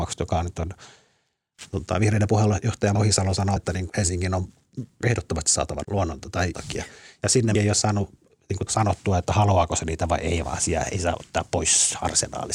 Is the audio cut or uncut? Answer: cut